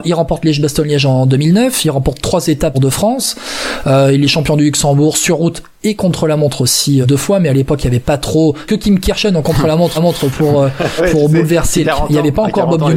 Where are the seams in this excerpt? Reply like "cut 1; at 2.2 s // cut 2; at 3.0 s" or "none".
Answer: cut 1; at 2.7 s // cut 2; at 7.0 s // cut 3; at 8.7 s // cut 4; at 9.9 s // cut 5; at 11.0 s // cut 6; at 11.8 s